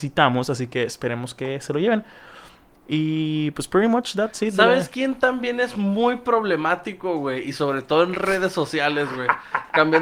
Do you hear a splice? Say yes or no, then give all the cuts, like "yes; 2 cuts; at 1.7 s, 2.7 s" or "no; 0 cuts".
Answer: no; 0 cuts